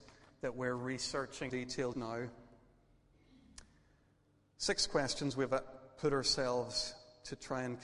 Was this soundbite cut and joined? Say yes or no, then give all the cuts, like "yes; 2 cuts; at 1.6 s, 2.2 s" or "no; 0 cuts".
yes; 2 cuts; at 1.5 s, 1.9 s